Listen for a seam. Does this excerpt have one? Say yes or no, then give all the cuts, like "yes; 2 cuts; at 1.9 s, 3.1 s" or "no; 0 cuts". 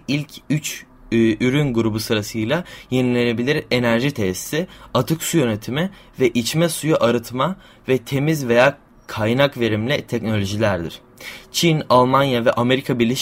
no; 0 cuts